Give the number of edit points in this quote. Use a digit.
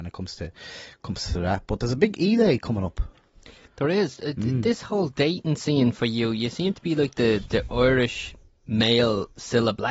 0